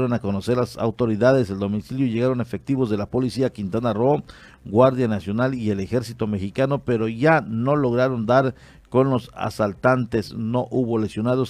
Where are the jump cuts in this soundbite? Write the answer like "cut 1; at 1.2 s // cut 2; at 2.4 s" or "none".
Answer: none